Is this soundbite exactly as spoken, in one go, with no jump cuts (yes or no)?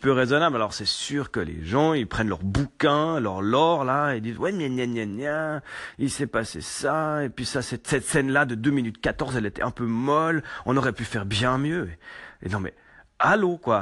yes